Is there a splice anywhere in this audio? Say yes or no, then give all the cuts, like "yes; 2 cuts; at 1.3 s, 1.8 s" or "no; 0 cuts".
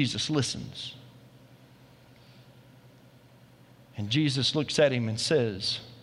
no; 0 cuts